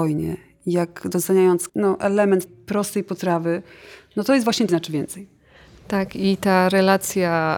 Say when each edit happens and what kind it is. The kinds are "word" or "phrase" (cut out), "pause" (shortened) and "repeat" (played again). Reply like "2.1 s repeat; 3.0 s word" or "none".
1.7 s word; 2.5 s word; 4.7 s word